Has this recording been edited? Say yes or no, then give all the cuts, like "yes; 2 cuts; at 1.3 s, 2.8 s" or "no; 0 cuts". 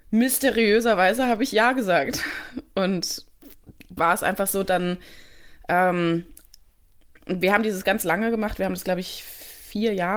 yes; 2 cuts; at 4.0 s, 7.8 s